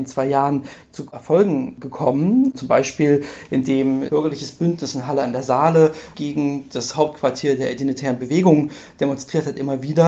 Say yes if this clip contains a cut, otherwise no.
yes